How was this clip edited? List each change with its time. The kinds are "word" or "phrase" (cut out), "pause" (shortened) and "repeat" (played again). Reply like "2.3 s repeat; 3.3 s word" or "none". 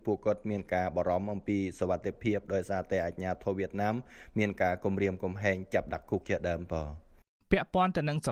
none